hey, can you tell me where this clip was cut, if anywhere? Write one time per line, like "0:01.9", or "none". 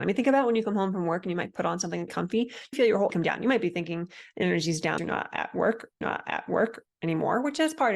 0:02.1
0:02.7
0:03.1
0:05.0
0:06.0